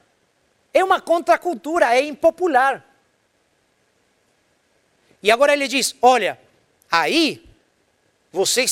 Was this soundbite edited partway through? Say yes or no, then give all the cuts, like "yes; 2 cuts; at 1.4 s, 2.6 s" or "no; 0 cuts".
no; 0 cuts